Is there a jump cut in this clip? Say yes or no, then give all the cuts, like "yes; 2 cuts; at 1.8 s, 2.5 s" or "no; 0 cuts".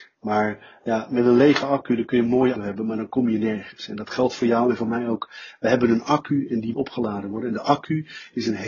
yes; 2 cuts; at 2.5 s, 6.7 s